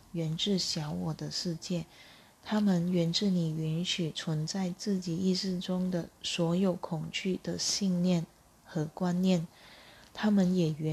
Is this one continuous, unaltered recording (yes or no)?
yes